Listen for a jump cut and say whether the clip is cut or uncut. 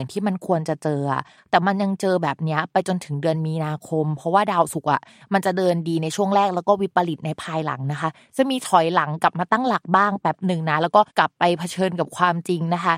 cut